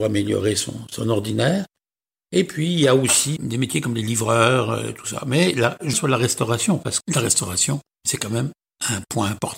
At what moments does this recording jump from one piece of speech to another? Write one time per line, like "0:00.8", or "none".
0:03.4
0:05.9
0:07.0